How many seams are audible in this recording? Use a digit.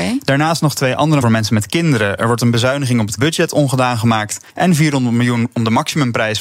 3